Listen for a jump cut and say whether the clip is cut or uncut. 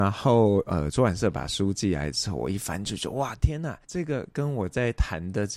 cut